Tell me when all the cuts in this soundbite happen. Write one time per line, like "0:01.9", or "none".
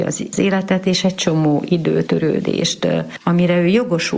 0:02.1

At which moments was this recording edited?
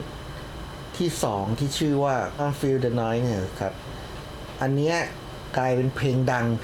0:02.4

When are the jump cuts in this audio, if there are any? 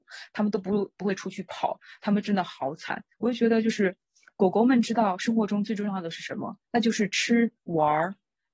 0:03.1
0:06.6
0:07.6

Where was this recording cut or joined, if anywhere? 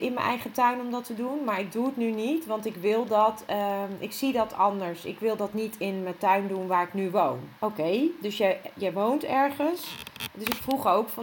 0:07.6

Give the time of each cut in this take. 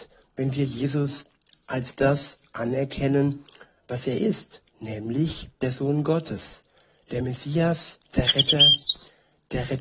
none

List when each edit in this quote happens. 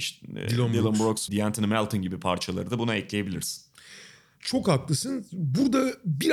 0:01.3

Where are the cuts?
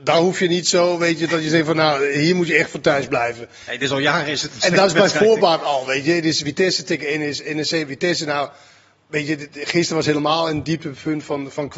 none

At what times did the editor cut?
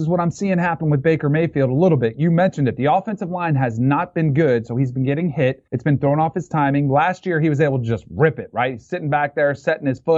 0:05.7

